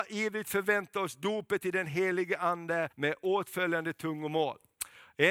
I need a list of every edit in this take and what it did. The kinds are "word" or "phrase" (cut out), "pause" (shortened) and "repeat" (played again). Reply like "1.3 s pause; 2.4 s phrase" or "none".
2.9 s pause